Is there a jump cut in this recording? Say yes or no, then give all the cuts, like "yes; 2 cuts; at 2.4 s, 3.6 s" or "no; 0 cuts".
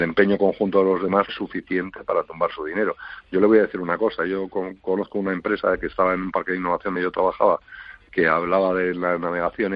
yes; 2 cuts; at 1.3 s, 7.0 s